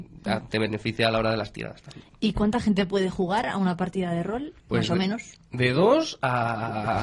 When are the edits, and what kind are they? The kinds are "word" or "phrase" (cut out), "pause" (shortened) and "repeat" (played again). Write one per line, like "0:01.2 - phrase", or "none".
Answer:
0:04.6 - pause